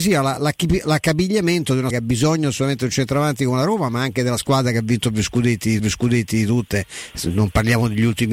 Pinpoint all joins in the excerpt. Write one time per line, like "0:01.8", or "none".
0:01.9
0:05.8